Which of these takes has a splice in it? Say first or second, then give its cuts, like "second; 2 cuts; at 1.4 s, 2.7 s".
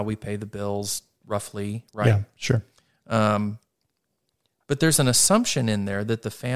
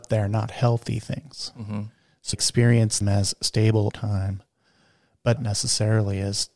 second; 4 cuts; at 2.3 s, 3.0 s, 3.9 s, 5.4 s